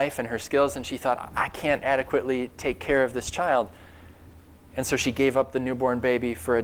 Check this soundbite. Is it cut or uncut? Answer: uncut